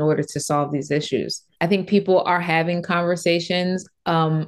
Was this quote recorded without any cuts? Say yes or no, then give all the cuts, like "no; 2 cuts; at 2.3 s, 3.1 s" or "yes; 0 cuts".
yes; 0 cuts